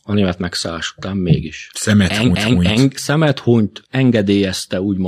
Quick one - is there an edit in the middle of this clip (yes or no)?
yes